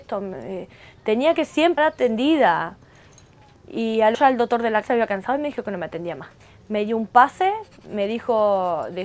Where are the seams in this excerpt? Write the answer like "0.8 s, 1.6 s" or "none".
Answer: 1.8 s, 4.1 s, 4.8 s, 6.4 s